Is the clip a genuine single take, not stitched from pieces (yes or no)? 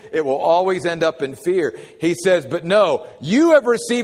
yes